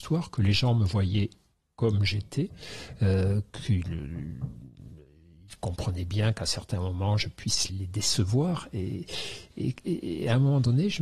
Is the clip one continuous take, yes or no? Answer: no